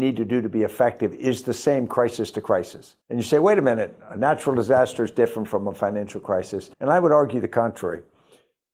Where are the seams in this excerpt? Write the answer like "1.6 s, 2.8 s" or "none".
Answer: 3.0 s, 6.7 s